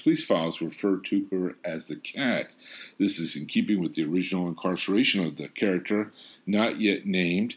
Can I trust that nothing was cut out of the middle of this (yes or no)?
yes